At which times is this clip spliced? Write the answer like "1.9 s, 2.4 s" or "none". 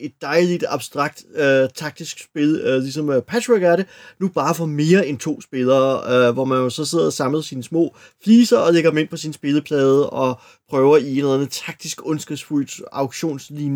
none

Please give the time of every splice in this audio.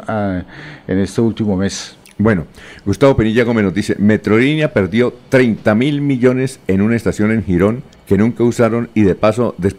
none

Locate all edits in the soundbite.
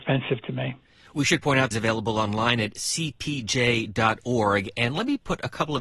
1.7 s

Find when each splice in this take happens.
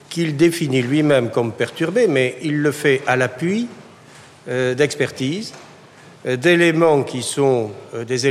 none

